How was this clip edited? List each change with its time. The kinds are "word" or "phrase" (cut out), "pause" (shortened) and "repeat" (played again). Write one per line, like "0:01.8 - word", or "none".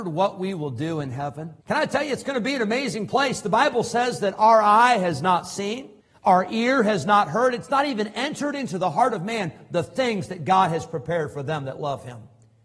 0:01.6 - pause
0:06.0 - pause